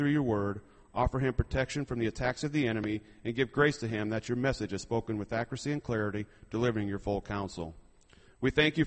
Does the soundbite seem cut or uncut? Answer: uncut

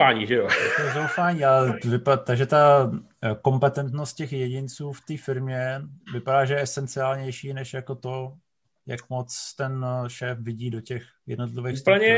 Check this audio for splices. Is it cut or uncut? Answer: uncut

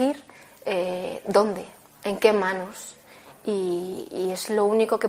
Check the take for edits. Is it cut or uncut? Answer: uncut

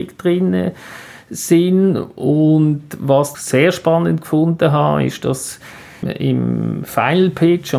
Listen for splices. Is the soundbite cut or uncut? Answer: cut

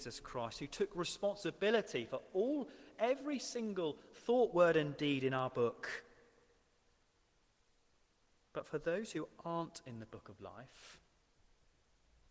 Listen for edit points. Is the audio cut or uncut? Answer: uncut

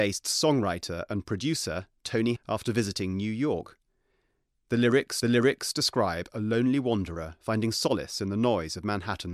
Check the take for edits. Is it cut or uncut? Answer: cut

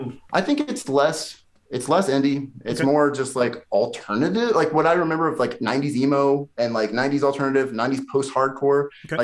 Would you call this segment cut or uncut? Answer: uncut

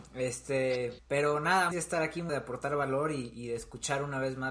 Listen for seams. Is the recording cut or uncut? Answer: cut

